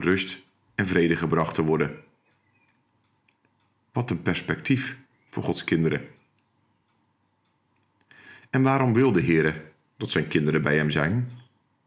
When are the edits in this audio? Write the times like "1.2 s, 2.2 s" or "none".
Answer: none